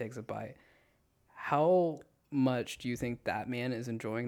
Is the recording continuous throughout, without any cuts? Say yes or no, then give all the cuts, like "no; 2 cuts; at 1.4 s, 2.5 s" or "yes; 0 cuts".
yes; 0 cuts